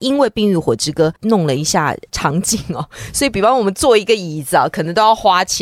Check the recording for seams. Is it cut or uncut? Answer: cut